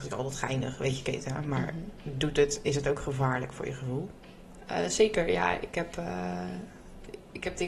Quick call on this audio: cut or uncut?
uncut